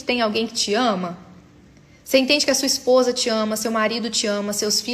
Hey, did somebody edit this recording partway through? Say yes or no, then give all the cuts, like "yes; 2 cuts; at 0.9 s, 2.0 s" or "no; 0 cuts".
no; 0 cuts